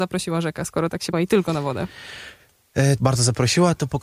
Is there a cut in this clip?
yes; 2 cuts; at 1.1 s, 3.0 s

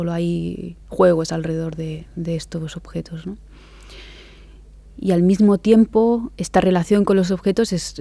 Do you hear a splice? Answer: no; 0 cuts

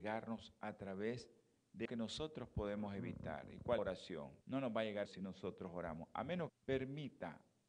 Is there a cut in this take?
yes; 5 cuts; at 1.9 s, 3.8 s, 4.4 s, 5.1 s, 6.5 s

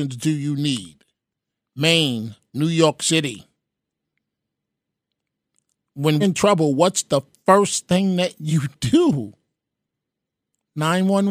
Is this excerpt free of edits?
no; 1 cut; at 6.2 s

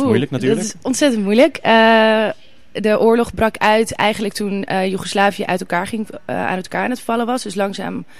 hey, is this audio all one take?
yes; 0 cuts

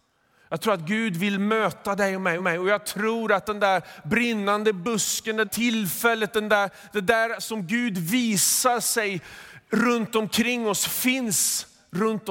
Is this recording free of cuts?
no; 2 cuts; at 2.4 s, 5.4 s

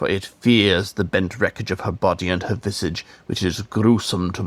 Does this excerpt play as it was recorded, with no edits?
yes; 0 cuts

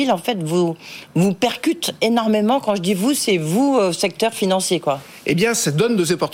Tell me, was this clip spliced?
no; 0 cuts

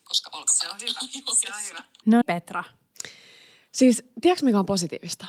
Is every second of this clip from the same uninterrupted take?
no; 1 cut; at 2.2 s

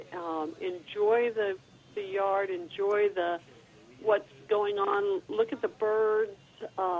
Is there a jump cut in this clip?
no; 0 cuts

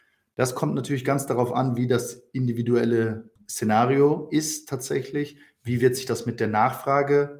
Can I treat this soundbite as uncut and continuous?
yes; 0 cuts

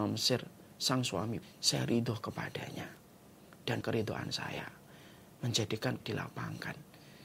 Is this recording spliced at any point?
yes; 3 cuts; at 1.4 s, 3.8 s, 6.0 s

